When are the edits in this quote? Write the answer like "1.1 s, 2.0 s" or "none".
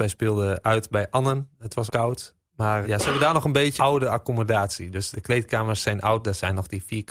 1.9 s, 2.8 s, 3.8 s, 5.1 s